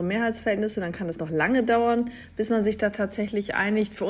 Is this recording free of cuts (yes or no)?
yes